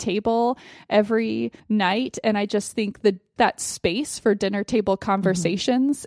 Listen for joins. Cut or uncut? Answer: cut